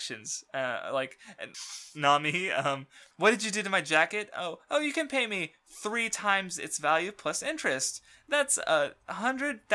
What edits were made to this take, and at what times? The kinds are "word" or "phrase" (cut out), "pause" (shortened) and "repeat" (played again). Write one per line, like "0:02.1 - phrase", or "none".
0:01.5 - word